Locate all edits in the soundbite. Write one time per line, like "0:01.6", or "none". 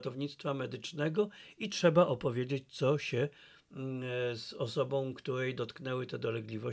none